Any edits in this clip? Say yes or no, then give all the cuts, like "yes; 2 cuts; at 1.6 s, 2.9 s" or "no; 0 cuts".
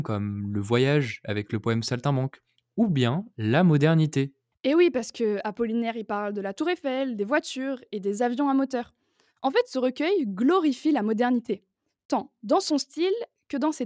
no; 0 cuts